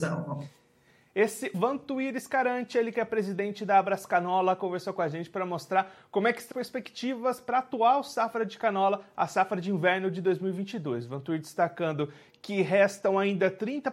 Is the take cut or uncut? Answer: cut